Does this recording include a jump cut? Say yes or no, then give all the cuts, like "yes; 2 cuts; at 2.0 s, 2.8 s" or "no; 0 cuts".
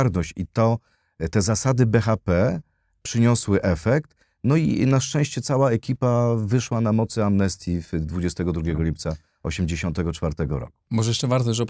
no; 0 cuts